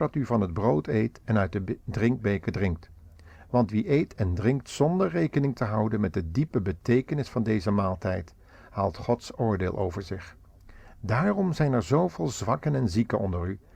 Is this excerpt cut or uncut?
uncut